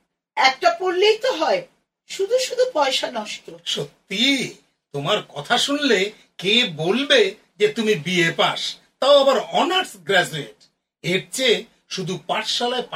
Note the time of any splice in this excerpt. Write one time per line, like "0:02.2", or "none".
none